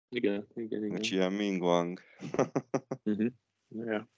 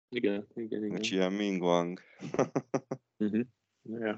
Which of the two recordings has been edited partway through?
first; 1 cut; at 3.0 s

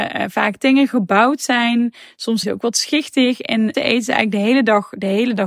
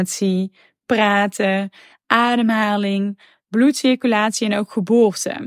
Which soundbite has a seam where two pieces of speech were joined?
first; 2 cuts; at 2.4 s, 3.7 s

